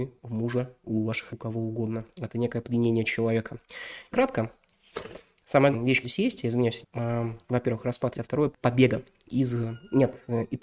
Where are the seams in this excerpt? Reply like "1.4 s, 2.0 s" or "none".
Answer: 1.3 s, 4.1 s, 5.7 s, 6.0 s, 6.8 s, 8.1 s, 8.5 s